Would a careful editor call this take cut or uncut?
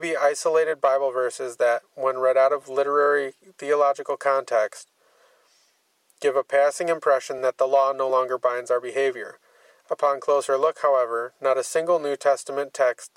uncut